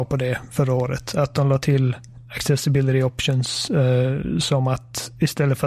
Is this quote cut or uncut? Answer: uncut